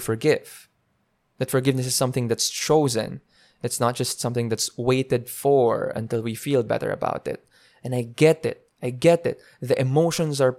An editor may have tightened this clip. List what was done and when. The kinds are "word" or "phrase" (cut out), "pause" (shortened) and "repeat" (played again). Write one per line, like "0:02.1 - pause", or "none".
none